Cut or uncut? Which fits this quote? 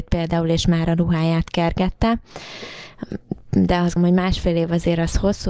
cut